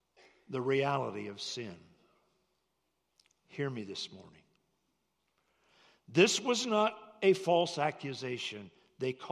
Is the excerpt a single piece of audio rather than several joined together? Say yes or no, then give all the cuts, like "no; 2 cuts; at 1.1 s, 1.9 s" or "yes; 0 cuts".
yes; 0 cuts